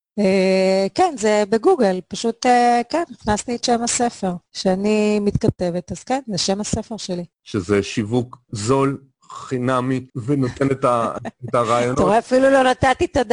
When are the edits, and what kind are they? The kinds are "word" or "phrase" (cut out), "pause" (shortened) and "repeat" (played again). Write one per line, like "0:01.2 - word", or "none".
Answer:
0:04.5 - pause
0:07.3 - pause
0:10.1 - pause